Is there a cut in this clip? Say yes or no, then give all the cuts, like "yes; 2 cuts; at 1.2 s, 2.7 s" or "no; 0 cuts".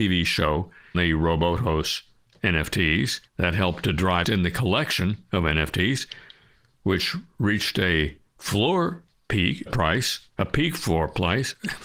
yes; 4 cuts; at 0.9 s, 3.3 s, 4.2 s, 9.7 s